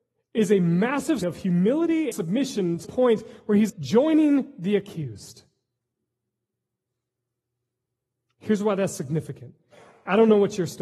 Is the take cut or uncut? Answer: cut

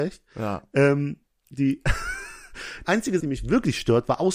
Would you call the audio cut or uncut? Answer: cut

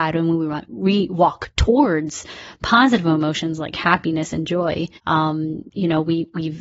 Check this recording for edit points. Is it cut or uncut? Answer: cut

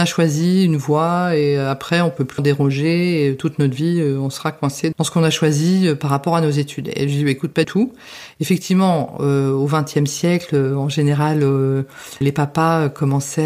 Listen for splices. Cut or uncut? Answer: cut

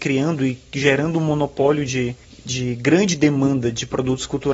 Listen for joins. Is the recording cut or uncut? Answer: cut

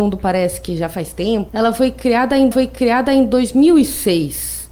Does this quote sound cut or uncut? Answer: cut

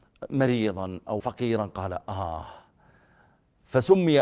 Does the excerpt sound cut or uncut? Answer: cut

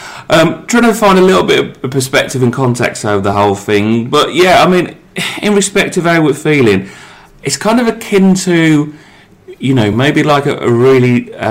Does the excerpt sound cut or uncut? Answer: uncut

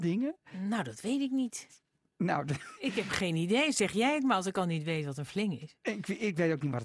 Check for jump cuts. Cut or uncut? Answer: uncut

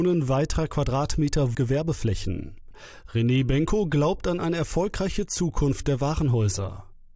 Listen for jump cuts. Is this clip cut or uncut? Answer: cut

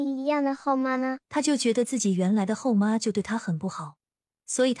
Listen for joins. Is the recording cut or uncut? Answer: cut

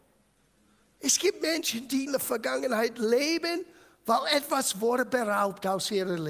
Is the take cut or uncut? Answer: cut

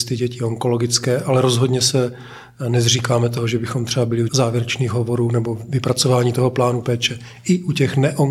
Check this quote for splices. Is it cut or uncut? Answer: cut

